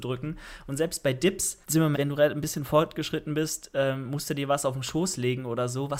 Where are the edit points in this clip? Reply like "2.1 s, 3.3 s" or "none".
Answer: 1.6 s, 1.9 s